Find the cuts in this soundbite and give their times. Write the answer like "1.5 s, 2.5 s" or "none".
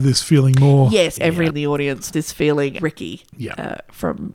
1.2 s, 1.5 s, 2.1 s, 2.8 s